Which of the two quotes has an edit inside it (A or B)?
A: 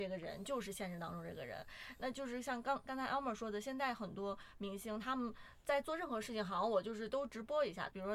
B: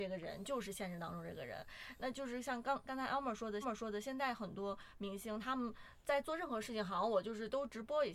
B